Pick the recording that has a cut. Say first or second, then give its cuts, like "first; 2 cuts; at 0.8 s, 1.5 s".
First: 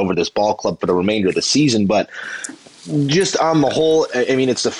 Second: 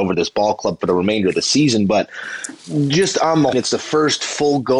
second; 2 cuts; at 2.6 s, 3.5 s